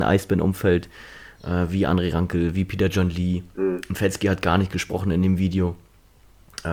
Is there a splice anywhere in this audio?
no; 0 cuts

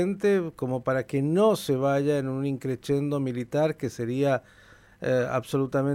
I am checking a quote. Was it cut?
no; 0 cuts

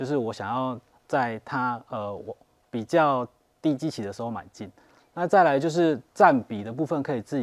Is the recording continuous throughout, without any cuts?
yes; 0 cuts

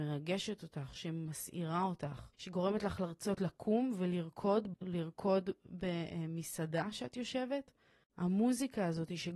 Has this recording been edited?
yes; 2 cuts; at 2.3 s, 4.7 s

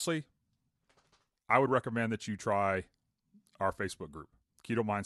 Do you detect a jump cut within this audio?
no; 0 cuts

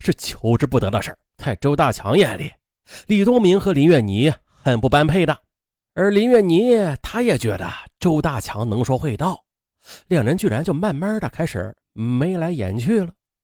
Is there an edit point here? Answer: yes; 3 cuts; at 1.3 s, 5.6 s, 11.8 s

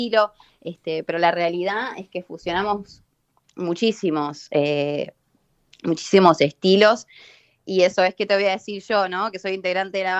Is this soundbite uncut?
yes; 0 cuts

